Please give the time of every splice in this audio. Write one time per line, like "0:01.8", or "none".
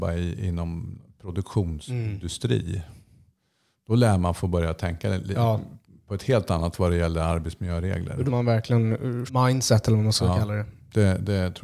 0:06.7
0:08.3
0:09.3